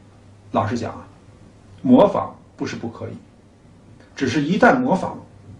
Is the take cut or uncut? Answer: uncut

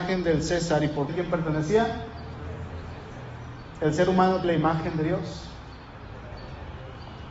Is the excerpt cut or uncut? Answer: cut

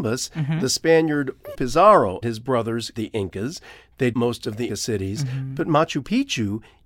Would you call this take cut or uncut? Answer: cut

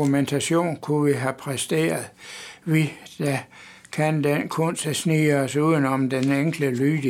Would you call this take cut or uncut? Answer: uncut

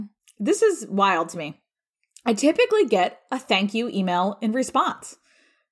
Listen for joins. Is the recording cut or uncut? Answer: uncut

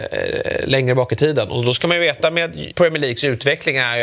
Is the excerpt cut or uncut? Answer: cut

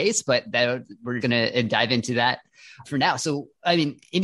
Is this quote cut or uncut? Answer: cut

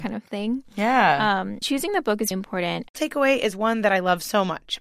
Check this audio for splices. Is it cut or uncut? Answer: cut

